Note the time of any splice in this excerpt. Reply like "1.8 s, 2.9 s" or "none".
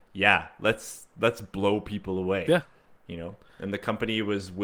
none